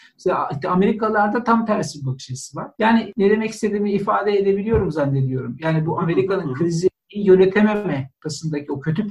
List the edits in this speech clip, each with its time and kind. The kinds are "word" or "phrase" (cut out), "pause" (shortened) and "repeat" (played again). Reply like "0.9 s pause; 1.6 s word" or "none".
2.7 s pause